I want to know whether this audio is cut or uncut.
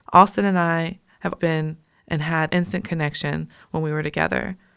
cut